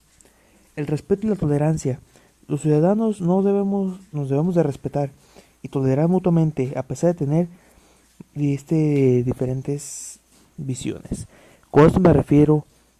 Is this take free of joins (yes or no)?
yes